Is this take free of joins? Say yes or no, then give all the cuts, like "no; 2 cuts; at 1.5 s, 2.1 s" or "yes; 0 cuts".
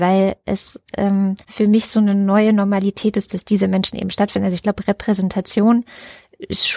no; 1 cut; at 1.4 s